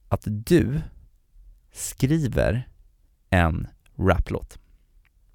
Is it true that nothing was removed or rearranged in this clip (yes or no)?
yes